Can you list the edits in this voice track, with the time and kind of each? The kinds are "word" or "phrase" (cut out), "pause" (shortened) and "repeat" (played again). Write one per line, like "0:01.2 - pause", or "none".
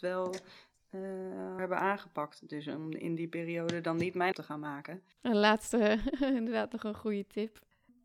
0:01.6 - word
0:04.3 - phrase
0:05.1 - pause